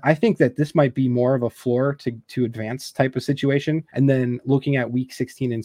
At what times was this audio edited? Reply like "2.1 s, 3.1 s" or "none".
3.9 s